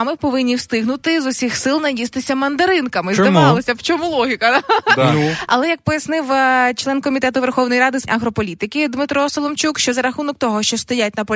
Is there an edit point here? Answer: yes; 1 cut; at 8.1 s

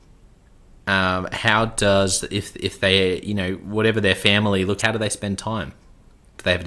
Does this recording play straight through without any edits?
no; 1 cut; at 4.8 s

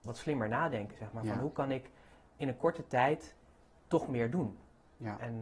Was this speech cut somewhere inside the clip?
no; 0 cuts

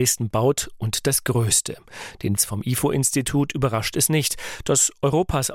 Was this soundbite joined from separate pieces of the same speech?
yes; 1 cut; at 2.4 s

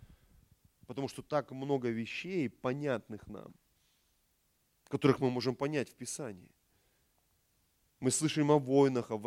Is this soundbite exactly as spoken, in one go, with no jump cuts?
yes; 0 cuts

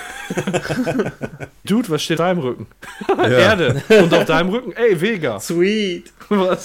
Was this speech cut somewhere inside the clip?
yes; 2 cuts; at 1.6 s, 2.2 s

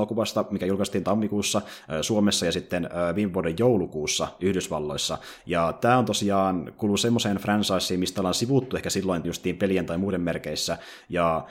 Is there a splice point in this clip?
yes; 2 cuts; at 1.0 s, 9.2 s

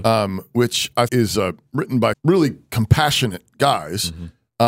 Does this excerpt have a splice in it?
yes; 3 cuts; at 1.1 s, 2.1 s, 2.7 s

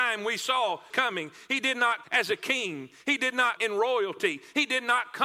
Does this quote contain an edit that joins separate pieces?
yes; 3 cuts; at 0.9 s, 2.0 s, 3.6 s

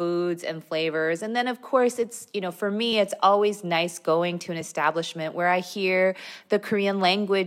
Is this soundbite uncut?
yes; 0 cuts

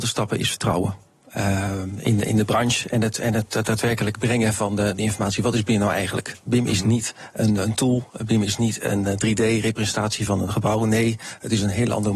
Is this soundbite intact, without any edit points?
yes; 0 cuts

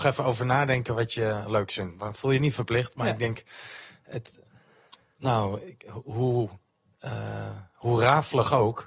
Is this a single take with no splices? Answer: yes; 0 cuts

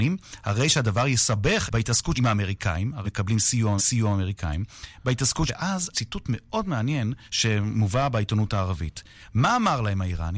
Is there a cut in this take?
yes; 7 cuts; at 1.7 s, 2.1 s, 3.0 s, 3.8 s, 5.5 s, 5.9 s, 7.3 s

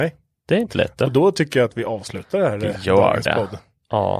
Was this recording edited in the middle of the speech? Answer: no; 0 cuts

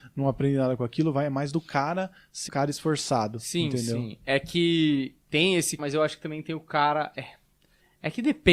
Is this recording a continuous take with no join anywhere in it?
no; 4 cuts; at 2.5 s, 5.2 s, 5.8 s, 7.1 s

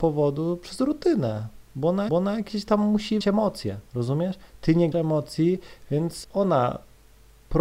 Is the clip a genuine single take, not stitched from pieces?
no; 6 cuts; at 1.7 s, 2.1 s, 3.2 s, 3.9 s, 4.9 s, 6.2 s

